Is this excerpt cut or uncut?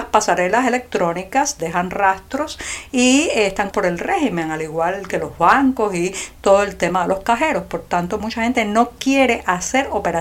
cut